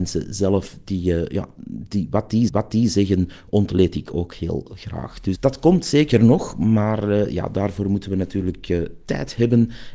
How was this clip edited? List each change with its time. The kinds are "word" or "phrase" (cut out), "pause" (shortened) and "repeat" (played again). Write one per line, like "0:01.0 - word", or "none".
0:02.5 - repeat
0:05.4 - word

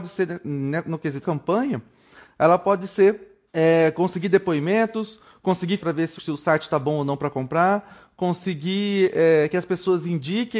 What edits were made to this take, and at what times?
0:01.2 - word
0:03.5 - pause
0:05.8 - word
0:06.2 - word

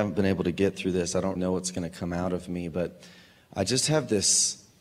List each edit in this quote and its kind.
0:01.4 - word

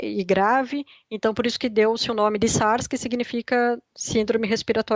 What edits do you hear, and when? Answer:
none

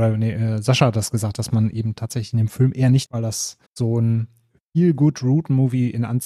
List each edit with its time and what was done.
0:03.1 - phrase
0:03.7 - pause

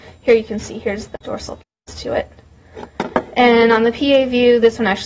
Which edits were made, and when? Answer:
0:01.2 - pause

